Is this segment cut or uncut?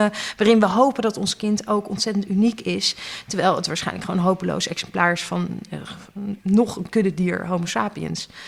uncut